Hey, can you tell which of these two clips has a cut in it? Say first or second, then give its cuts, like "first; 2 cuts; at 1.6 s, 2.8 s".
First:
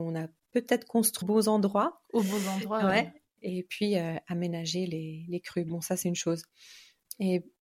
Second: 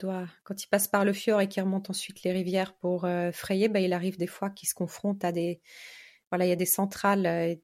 first; 1 cut; at 1.2 s